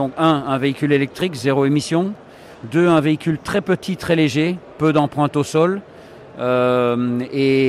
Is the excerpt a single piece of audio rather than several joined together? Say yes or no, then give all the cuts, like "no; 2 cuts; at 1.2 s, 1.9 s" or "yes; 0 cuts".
yes; 0 cuts